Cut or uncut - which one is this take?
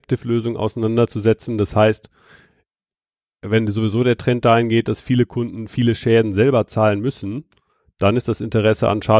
uncut